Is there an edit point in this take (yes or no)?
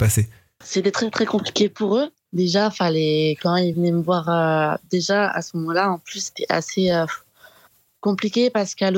no